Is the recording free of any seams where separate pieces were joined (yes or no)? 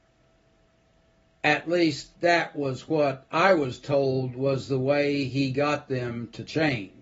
no